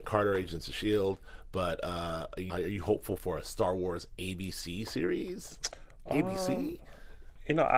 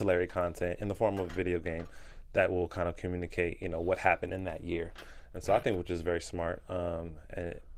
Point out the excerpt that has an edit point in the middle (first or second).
first